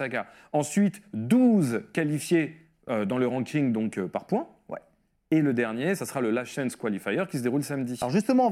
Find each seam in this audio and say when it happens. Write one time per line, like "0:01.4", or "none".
none